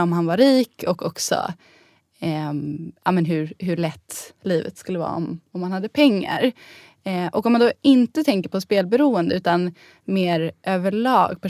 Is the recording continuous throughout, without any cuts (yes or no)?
yes